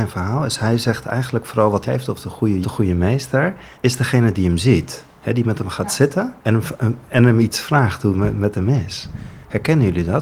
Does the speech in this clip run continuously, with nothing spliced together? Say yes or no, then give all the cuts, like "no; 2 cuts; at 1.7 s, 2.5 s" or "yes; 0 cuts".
no; 4 cuts; at 1.8 s, 2.6 s, 3.7 s, 6.4 s